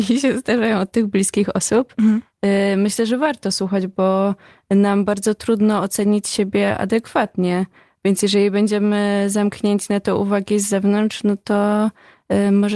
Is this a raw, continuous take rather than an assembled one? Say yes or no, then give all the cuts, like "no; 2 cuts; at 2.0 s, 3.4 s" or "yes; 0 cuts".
yes; 0 cuts